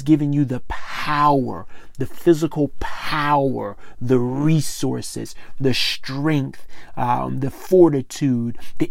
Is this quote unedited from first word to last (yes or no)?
yes